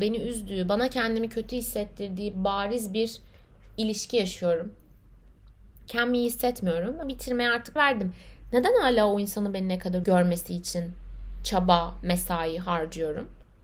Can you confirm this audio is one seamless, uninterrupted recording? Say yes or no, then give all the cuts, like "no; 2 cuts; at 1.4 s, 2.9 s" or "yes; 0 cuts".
no; 3 cuts; at 7.0 s, 7.8 s, 10.0 s